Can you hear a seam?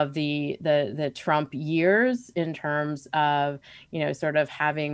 no; 0 cuts

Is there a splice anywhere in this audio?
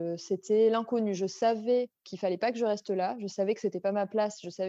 yes; 1 cut; at 2.0 s

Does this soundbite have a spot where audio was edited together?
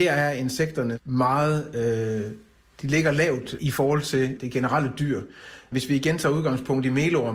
no; 0 cuts

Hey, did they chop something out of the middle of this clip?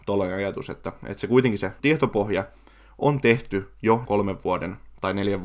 yes; 2 cuts; at 1.8 s, 4.1 s

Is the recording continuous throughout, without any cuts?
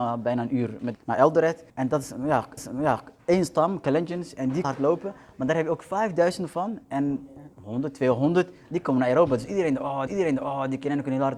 no; 6 cuts; at 0.9 s, 1.7 s, 2.6 s, 4.6 s, 7.5 s, 10.1 s

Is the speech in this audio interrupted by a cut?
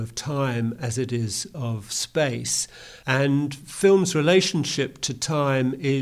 no; 0 cuts

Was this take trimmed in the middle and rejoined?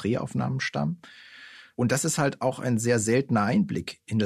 no; 0 cuts

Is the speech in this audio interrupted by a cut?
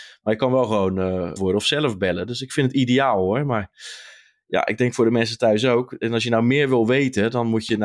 yes; 1 cut; at 1.4 s

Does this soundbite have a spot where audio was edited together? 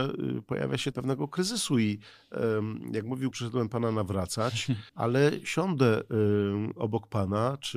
yes; 3 cuts; at 0.9 s, 3.3 s, 4.9 s

